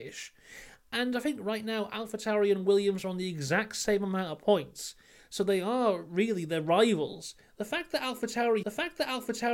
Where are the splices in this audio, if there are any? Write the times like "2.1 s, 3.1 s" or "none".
8.6 s